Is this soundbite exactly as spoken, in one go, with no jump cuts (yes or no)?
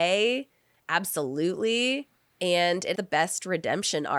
no